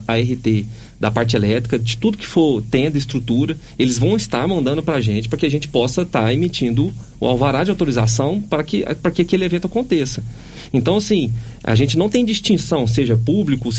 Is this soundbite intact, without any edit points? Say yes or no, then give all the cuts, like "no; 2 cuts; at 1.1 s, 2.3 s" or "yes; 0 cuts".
yes; 0 cuts